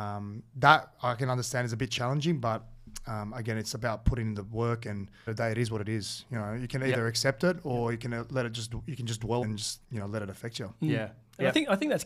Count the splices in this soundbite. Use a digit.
3